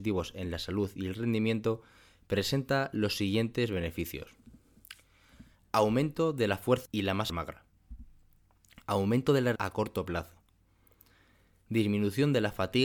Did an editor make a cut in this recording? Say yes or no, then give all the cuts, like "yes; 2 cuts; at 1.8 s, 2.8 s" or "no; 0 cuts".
yes; 3 cuts; at 6.9 s, 7.3 s, 9.6 s